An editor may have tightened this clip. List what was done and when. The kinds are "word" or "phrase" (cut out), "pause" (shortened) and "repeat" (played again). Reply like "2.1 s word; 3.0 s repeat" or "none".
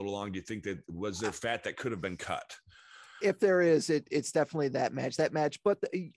none